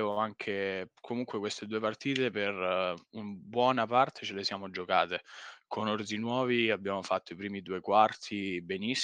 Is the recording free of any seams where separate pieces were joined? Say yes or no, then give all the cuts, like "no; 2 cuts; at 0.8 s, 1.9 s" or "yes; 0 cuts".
yes; 0 cuts